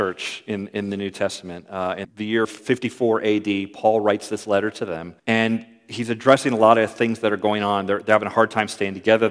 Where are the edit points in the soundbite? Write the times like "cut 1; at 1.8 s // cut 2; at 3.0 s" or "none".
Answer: cut 1; at 2.0 s // cut 2; at 2.4 s // cut 3; at 5.2 s